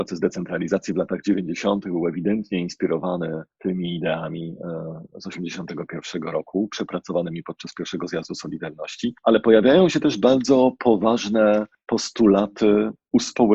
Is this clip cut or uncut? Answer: uncut